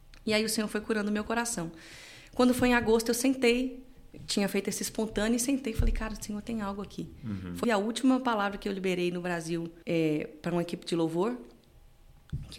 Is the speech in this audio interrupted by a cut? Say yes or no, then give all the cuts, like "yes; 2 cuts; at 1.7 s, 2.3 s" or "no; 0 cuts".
yes; 2 cuts; at 7.6 s, 9.8 s